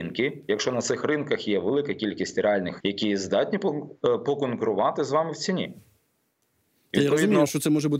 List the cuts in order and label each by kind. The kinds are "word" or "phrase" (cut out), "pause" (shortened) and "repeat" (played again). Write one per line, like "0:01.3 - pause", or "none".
0:02.8 - word